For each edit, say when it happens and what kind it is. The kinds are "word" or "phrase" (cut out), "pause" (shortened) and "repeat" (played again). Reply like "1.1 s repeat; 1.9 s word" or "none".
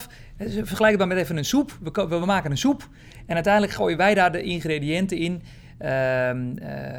none